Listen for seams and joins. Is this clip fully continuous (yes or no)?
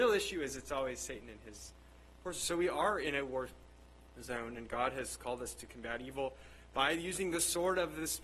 yes